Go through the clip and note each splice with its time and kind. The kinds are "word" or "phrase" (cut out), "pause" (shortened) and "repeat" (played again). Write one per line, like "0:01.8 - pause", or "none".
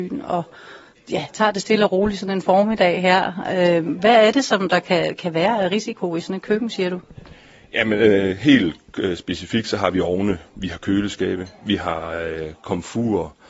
none